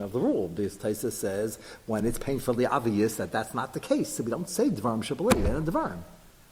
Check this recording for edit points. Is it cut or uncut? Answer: uncut